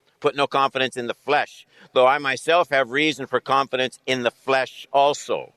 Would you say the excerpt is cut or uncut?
uncut